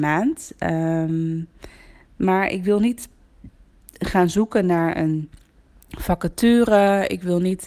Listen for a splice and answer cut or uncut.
uncut